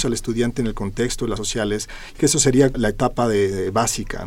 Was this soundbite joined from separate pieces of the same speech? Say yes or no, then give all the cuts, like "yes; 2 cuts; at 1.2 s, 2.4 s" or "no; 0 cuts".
yes; 3 cuts; at 1.4 s, 2.2 s, 2.7 s